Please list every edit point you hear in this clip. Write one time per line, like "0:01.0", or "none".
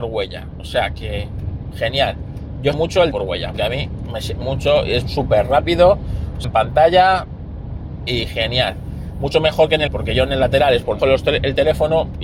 0:02.7
0:03.1
0:03.5
0:04.4
0:06.4
0:09.9
0:11.0